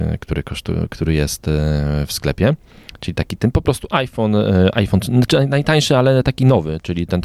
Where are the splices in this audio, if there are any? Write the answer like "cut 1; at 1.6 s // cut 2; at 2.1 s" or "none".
none